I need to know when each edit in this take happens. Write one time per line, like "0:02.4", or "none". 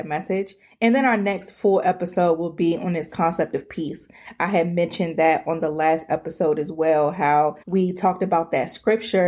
0:07.6